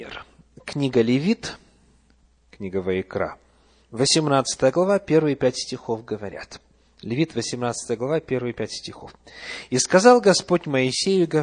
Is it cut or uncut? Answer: uncut